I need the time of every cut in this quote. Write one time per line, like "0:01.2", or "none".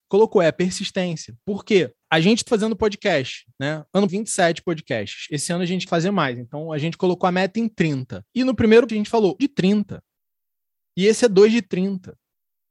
0:02.0
0:02.5
0:04.1
0:05.9
0:08.3
0:08.9
0:09.4